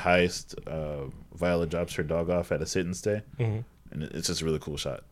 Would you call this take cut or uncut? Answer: cut